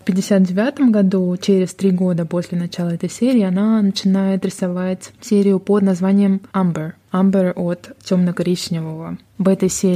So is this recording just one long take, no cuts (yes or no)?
yes